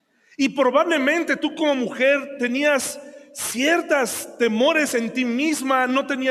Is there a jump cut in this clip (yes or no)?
no